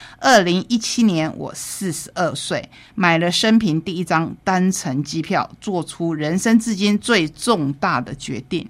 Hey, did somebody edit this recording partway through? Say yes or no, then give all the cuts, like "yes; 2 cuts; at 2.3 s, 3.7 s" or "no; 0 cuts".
no; 0 cuts